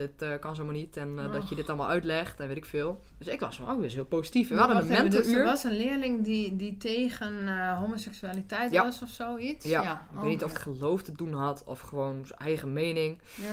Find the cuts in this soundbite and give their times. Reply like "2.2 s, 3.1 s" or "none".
3.1 s, 10.5 s